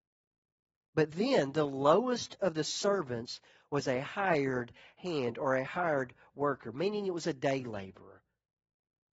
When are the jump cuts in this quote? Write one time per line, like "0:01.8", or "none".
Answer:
none